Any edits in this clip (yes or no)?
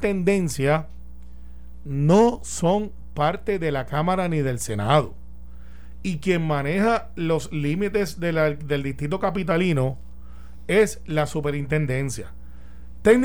no